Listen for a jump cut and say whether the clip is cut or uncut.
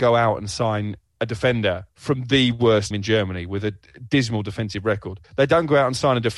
cut